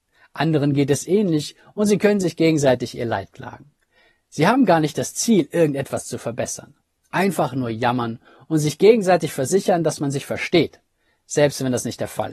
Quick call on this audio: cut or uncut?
uncut